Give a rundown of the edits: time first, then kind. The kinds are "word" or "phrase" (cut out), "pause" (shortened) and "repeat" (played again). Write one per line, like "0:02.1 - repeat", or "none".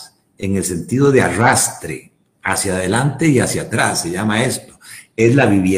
none